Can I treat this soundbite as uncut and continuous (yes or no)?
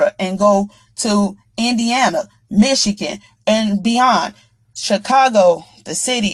yes